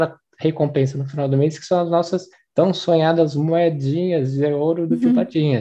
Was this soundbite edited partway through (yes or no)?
yes